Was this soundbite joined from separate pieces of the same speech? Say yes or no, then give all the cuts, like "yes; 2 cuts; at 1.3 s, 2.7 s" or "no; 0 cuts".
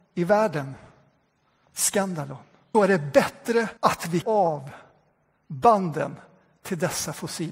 yes; 3 cuts; at 2.7 s, 3.8 s, 4.2 s